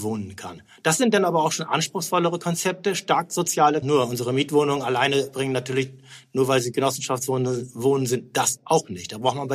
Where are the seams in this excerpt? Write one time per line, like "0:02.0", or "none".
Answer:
0:03.8